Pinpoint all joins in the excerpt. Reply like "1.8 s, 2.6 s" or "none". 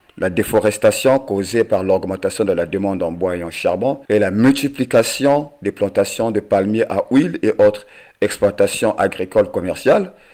4.0 s

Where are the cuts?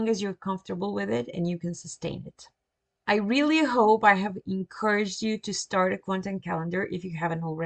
none

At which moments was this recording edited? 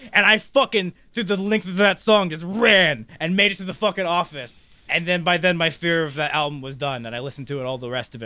none

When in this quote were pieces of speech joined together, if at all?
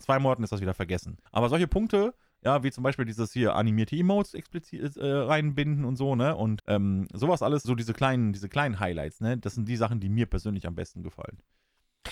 1.3 s, 6.6 s, 7.6 s

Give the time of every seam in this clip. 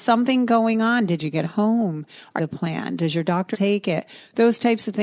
1.4 s, 2.4 s, 3.5 s

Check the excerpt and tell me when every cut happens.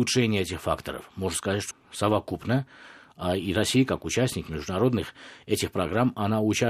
1.7 s

